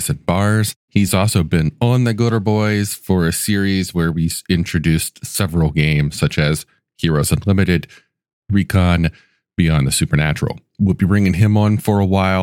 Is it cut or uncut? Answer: uncut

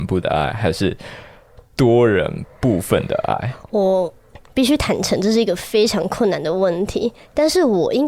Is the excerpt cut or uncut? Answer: cut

